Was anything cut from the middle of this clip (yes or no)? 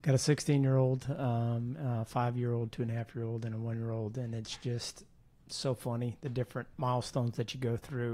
no